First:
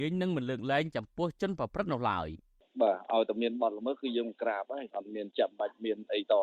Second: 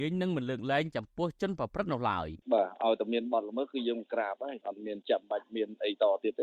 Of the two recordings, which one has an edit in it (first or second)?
second